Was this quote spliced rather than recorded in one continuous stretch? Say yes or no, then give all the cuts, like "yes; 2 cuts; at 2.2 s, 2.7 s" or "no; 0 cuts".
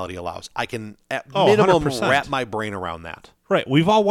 no; 0 cuts